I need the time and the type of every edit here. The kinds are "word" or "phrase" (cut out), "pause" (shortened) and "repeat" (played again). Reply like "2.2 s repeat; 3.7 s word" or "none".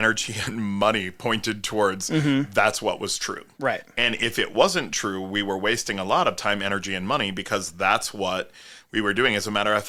none